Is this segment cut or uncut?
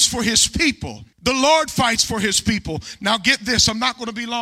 cut